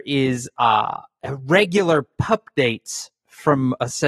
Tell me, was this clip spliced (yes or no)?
no